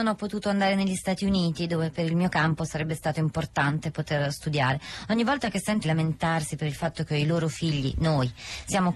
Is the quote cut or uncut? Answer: cut